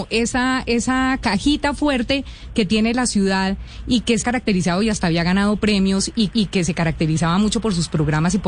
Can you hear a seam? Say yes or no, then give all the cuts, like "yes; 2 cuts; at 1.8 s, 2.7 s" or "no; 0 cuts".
yes; 2 cuts; at 4.2 s, 6.3 s